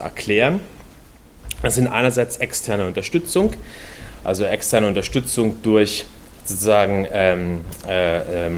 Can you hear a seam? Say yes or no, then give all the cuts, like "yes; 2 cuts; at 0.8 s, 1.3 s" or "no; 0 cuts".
no; 0 cuts